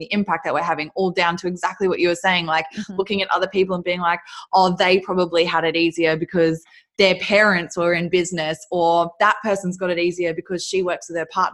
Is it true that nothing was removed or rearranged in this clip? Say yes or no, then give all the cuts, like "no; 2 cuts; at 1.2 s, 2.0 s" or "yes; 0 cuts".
yes; 0 cuts